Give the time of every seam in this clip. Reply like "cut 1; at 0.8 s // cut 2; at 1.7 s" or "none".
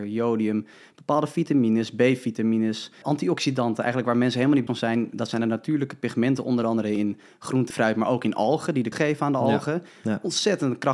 cut 1; at 3.0 s // cut 2; at 4.7 s // cut 3; at 7.7 s // cut 4; at 8.9 s